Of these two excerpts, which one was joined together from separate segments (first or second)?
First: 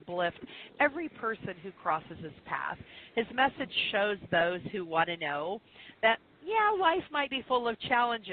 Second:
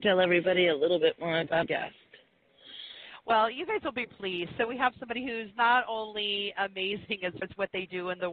second